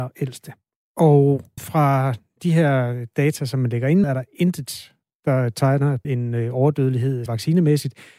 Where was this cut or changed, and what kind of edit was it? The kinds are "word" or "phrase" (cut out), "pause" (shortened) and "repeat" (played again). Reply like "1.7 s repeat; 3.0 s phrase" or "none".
1.6 s word; 4.0 s word; 6.0 s word; 7.3 s word